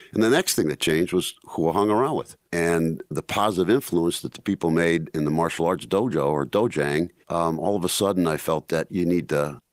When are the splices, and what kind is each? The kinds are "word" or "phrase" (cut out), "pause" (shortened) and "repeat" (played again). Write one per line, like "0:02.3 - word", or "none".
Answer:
0:02.4 - pause
0:07.2 - pause